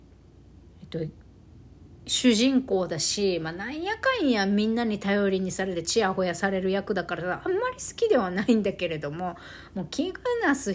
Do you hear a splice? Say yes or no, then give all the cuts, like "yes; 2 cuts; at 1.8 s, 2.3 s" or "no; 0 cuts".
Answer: no; 0 cuts